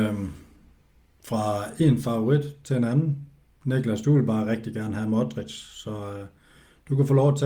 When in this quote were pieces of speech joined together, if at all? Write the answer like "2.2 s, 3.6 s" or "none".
none